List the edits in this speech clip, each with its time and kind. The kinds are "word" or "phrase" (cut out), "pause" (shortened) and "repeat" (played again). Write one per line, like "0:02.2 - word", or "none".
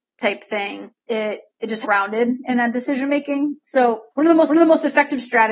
0:01.0 - pause
0:01.8 - phrase
0:04.1 - pause
0:04.5 - repeat